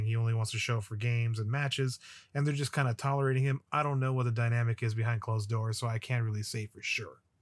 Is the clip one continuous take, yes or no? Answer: yes